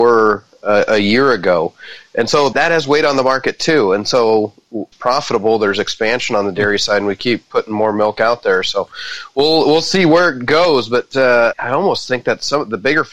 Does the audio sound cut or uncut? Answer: cut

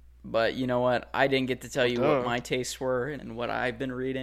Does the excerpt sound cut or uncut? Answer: cut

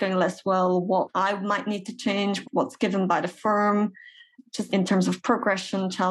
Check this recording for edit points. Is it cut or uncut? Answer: cut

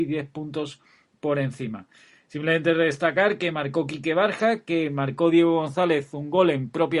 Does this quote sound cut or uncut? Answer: uncut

